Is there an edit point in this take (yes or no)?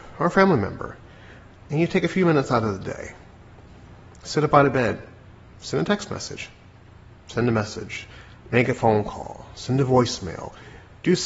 no